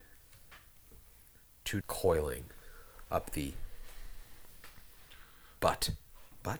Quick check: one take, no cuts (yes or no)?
no